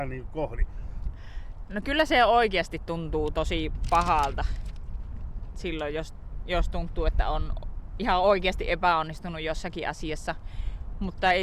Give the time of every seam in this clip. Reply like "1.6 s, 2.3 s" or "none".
none